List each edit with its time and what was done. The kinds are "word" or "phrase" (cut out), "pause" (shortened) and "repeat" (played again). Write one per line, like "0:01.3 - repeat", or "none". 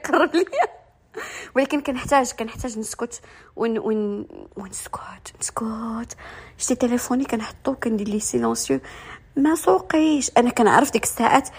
0:04.5 - pause